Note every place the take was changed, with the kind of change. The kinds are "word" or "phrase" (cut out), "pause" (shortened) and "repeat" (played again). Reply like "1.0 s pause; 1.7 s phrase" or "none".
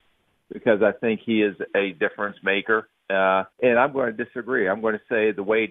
1.7 s word; 3.5 s pause